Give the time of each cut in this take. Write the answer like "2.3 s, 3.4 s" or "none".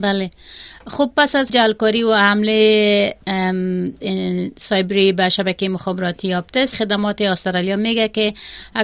1.5 s, 6.7 s